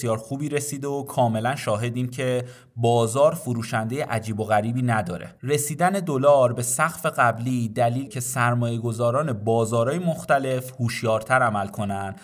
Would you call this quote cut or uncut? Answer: cut